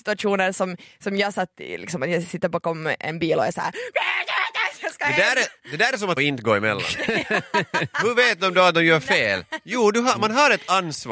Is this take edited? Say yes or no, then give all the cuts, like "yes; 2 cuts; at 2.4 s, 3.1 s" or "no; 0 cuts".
yes; 1 cut; at 6.2 s